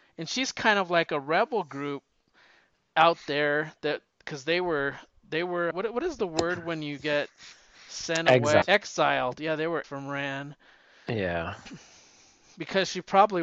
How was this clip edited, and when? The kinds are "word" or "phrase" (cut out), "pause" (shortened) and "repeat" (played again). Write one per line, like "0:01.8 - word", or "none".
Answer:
0:05.7 - word
0:08.6 - word
0:09.8 - word

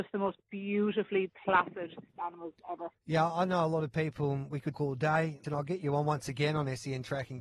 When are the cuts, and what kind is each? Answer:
0:01.3 - word
0:02.2 - word
0:03.0 - pause
0:04.7 - word
0:05.4 - word

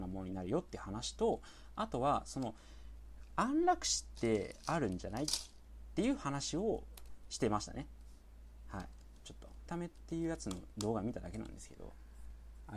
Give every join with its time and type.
0:09.7 - phrase

